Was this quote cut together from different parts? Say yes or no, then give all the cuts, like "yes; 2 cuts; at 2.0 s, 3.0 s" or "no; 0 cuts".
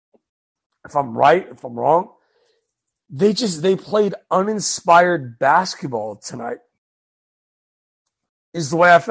no; 0 cuts